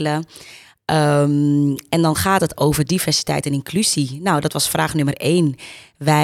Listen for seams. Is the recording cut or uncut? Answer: uncut